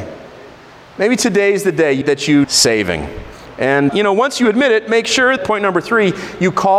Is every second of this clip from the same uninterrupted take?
no; 4 cuts; at 2.0 s, 2.4 s, 3.9 s, 5.4 s

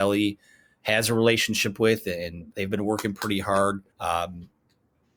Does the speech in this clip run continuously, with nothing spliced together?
no; 2 cuts; at 2.5 s, 3.9 s

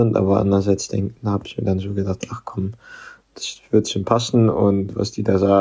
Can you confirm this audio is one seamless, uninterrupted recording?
yes; 0 cuts

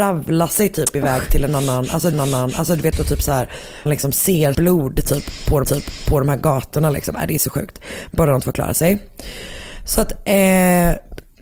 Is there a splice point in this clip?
yes; 6 cuts; at 2.1 s, 2.9 s, 3.9 s, 4.5 s, 5.6 s, 8.1 s

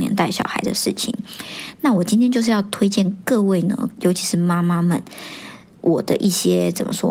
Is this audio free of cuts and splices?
yes; 0 cuts

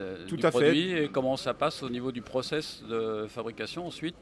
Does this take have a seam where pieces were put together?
no; 0 cuts

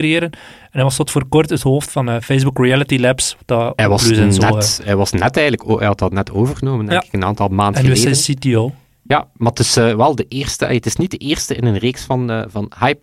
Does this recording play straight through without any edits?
yes; 0 cuts

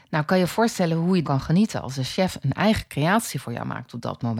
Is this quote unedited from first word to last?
no; 1 cut; at 1.2 s

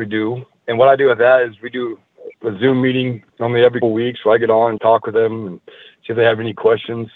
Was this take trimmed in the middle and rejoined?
yes; 4 cuts; at 2.3 s, 3.3 s, 3.8 s, 4.8 s

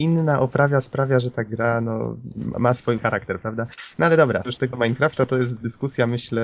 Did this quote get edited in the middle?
yes; 2 cuts; at 3.0 s, 4.4 s

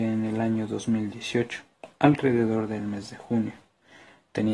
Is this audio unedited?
yes; 0 cuts

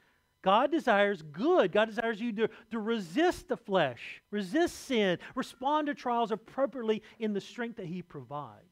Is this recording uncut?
yes; 0 cuts

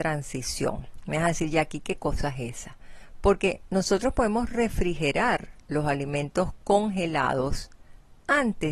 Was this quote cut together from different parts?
no; 0 cuts

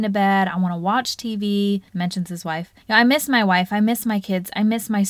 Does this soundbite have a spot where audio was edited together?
yes; 2 cuts; at 1.9 s, 2.8 s

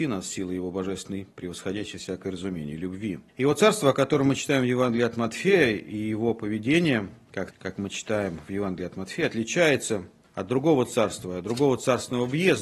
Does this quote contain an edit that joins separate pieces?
yes; 3 cuts; at 3.3 s, 7.5 s, 10.2 s

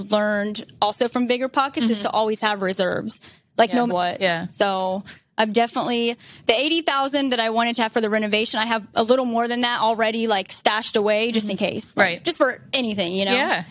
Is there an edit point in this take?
yes; 1 cut; at 3.9 s

